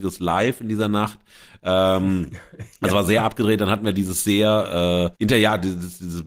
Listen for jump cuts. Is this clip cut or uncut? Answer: cut